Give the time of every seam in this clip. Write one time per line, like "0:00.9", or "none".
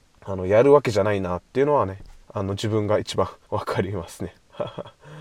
0:02.2
0:03.4